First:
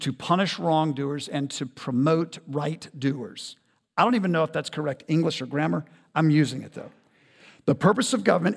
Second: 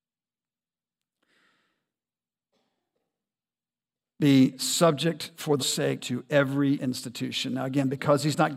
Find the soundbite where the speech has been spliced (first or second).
second